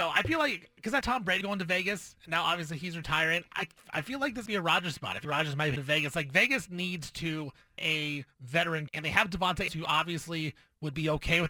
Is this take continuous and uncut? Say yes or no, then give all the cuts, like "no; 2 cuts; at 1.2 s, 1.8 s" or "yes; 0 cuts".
no; 8 cuts; at 1.0 s, 1.4 s, 4.5 s, 5.2 s, 5.8 s, 7.8 s, 8.9 s, 9.7 s